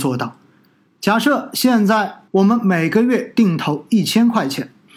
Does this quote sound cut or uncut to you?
cut